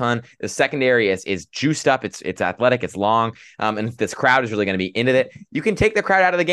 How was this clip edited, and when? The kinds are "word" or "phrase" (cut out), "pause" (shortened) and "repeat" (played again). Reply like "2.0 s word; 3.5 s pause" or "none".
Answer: none